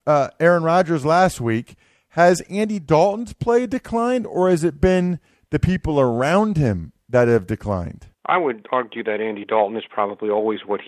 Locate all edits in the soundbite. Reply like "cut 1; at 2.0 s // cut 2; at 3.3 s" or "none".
cut 1; at 8.1 s